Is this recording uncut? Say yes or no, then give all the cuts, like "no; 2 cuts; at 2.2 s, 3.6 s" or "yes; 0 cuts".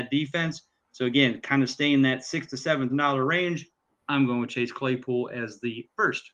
no; 1 cut; at 2.9 s